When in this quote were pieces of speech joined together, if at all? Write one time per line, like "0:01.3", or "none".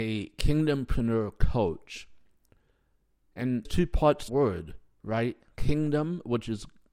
0:03.7
0:04.3

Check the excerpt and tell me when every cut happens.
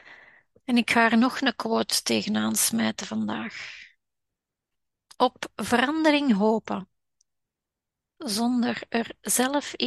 none

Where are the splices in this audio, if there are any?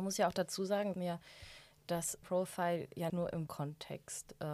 0:00.9
0:02.2
0:03.1
0:03.5

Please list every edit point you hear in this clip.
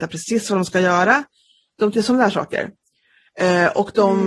0:01.9

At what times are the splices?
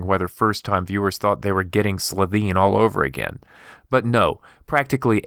none

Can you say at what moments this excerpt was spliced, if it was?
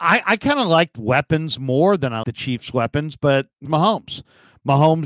0:01.0
0:02.2
0:03.7

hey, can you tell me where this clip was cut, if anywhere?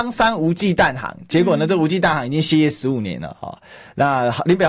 none

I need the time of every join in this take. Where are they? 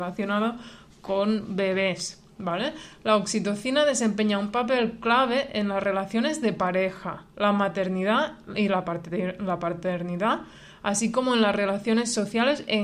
none

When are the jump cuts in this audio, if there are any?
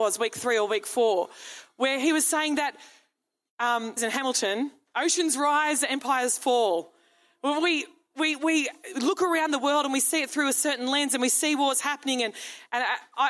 0:04.0

